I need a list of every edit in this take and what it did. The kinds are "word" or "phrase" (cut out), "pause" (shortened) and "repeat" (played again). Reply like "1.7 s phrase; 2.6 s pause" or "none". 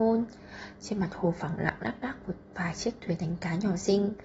none